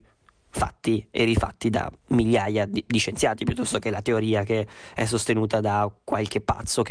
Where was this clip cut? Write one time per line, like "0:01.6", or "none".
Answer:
none